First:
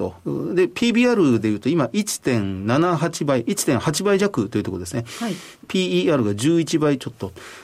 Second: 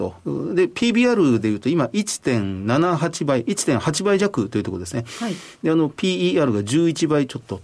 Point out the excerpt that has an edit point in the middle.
first; 1 cut; at 5.6 s

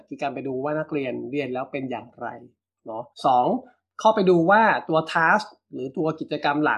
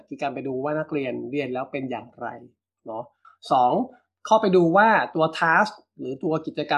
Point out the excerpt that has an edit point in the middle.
first; 1 cut; at 3.1 s

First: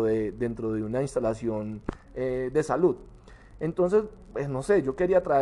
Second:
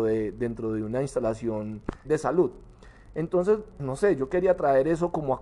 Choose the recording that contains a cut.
second; 2 cuts; at 2.0 s, 3.8 s

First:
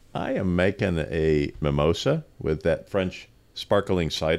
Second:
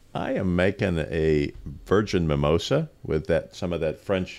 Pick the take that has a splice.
first; 2 cuts; at 1.6 s, 2.9 s

